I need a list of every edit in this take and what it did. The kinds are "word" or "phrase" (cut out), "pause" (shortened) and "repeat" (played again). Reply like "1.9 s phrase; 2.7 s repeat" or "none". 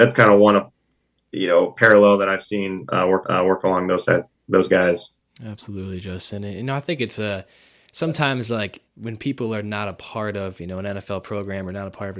3.2 s repeat; 8.9 s pause